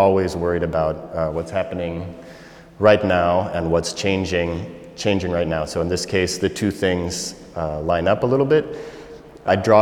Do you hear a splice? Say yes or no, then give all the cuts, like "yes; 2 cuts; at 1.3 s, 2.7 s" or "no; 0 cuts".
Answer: no; 0 cuts